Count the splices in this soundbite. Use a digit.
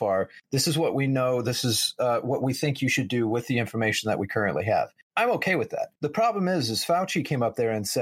1